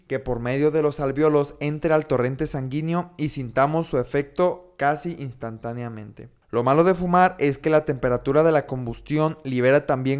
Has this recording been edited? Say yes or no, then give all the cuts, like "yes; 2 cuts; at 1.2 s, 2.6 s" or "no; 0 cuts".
no; 0 cuts